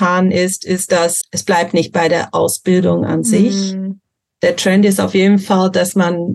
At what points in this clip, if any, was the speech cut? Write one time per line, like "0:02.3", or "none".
0:01.2